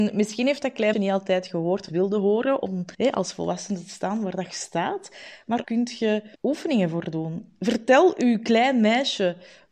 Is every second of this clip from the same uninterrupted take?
no; 6 cuts; at 0.9 s, 1.9 s, 2.9 s, 4.5 s, 5.6 s, 6.3 s

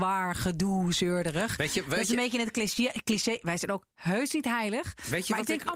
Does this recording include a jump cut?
no; 0 cuts

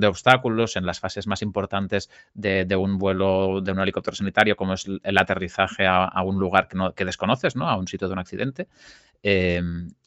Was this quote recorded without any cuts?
yes; 0 cuts

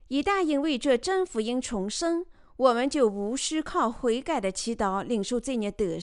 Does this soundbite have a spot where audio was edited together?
no; 0 cuts

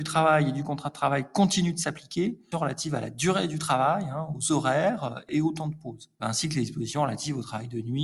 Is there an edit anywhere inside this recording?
yes; 1 cut; at 2.5 s

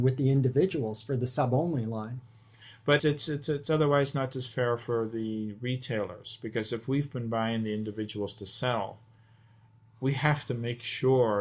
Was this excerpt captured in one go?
no; 1 cut; at 3.0 s

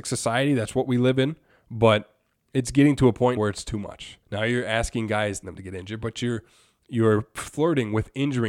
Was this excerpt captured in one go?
no; 4 cuts; at 1.5 s, 3.4 s, 4.2 s, 5.4 s

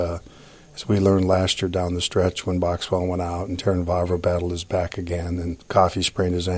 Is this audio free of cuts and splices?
yes; 0 cuts

